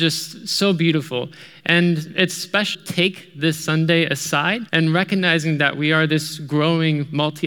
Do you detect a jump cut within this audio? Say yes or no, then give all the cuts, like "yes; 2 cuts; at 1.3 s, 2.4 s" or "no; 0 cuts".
yes; 2 cuts; at 2.7 s, 4.7 s